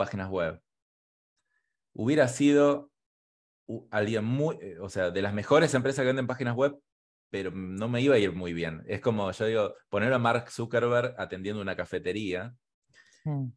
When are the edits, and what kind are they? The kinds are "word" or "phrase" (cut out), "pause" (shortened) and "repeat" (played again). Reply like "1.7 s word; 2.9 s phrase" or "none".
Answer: none